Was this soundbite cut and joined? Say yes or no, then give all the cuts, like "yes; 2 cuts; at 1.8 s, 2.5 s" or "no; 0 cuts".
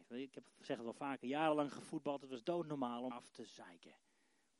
yes; 1 cut; at 3.1 s